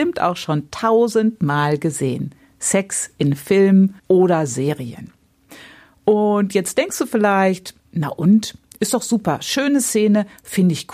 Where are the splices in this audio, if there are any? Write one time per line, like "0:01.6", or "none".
0:04.0